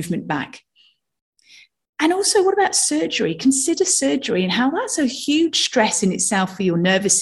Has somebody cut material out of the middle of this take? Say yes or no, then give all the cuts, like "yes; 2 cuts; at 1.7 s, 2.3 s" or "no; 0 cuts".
no; 0 cuts